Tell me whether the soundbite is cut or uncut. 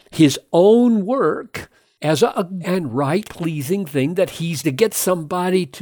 cut